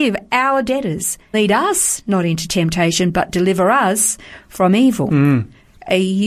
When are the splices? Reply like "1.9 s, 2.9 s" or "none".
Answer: 1.3 s